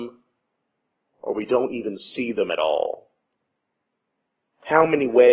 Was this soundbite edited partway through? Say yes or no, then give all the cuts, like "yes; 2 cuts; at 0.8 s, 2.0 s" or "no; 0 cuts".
no; 0 cuts